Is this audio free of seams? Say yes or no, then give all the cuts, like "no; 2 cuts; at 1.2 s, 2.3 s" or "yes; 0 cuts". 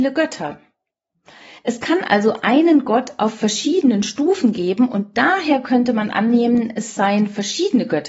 yes; 0 cuts